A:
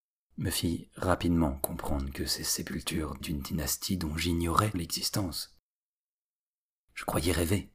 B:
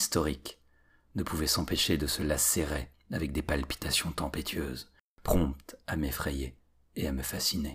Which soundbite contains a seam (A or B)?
A